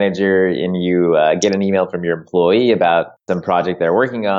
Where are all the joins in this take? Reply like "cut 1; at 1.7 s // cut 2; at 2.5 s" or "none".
cut 1; at 3.2 s